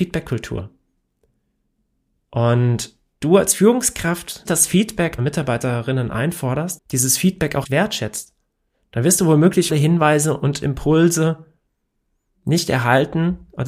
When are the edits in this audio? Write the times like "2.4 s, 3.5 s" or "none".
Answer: 3.1 s, 4.5 s, 5.2 s, 6.8 s, 7.6 s, 9.7 s